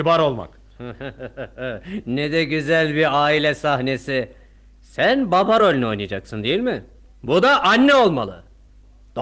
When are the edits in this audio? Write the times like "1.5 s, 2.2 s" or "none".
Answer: none

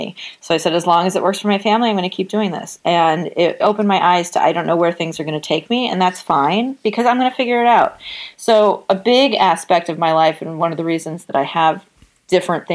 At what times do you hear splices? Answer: 3.6 s

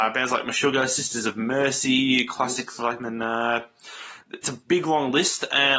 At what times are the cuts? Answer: 3.0 s, 4.4 s

